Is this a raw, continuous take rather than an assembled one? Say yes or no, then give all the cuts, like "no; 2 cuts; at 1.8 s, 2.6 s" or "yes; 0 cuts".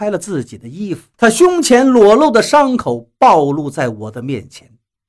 no; 1 cut; at 1.1 s